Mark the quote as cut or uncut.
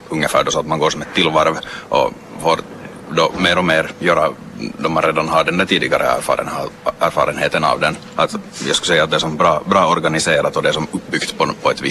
uncut